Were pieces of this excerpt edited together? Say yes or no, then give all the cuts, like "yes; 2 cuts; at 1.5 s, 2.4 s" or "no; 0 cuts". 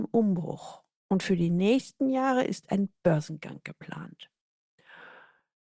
no; 0 cuts